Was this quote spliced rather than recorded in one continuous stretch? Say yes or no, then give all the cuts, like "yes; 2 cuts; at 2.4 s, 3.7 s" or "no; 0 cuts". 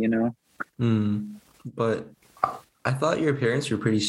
no; 0 cuts